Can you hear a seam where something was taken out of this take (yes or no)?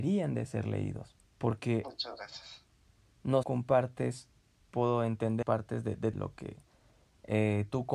yes